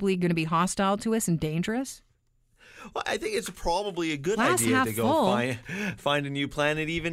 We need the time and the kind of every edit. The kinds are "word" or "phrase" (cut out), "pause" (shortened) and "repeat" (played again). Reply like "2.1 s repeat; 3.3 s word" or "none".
none